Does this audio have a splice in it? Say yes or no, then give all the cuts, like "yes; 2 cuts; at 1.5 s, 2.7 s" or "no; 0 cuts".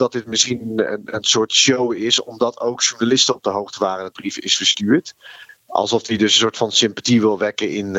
yes; 1 cut; at 4.1 s